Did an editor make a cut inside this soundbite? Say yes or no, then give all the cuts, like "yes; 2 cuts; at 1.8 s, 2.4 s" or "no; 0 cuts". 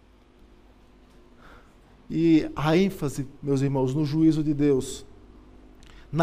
no; 0 cuts